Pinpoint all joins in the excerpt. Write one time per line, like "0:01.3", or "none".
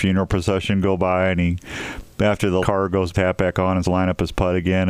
0:02.6
0:03.1
0:03.8